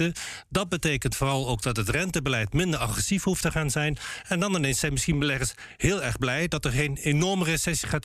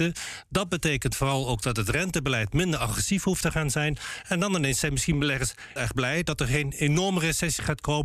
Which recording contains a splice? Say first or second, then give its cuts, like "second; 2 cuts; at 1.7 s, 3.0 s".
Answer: second; 1 cut; at 5.8 s